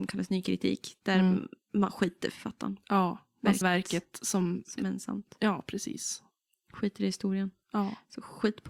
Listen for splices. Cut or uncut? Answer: cut